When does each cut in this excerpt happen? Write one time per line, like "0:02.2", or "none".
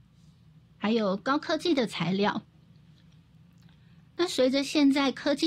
none